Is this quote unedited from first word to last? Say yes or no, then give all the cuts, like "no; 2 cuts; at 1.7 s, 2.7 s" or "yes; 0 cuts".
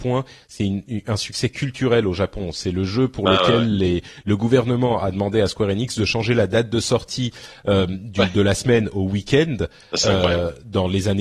yes; 0 cuts